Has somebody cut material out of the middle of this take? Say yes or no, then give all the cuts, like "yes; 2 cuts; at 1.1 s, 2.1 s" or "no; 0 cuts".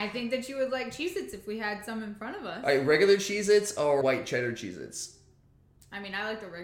yes; 1 cut; at 4.0 s